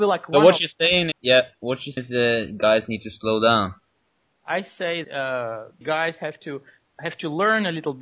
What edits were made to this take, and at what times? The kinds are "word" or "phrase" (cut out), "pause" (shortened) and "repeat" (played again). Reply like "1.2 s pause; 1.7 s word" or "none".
1.1 s word; 2.0 s word; 5.0 s word; 5.8 s word; 6.9 s word